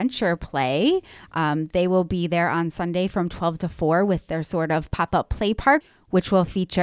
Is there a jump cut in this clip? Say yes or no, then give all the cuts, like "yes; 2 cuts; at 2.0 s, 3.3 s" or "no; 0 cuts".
no; 0 cuts